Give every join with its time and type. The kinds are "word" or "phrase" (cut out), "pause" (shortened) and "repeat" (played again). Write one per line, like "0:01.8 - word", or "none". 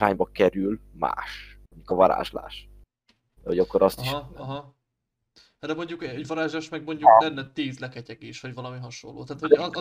none